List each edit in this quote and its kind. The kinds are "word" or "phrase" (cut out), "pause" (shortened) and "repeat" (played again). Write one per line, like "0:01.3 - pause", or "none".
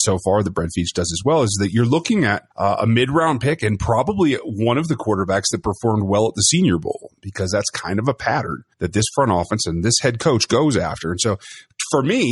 0:02.5 - pause
0:08.7 - pause